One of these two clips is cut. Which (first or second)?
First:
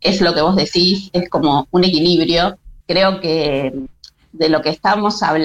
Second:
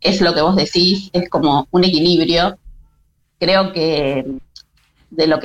first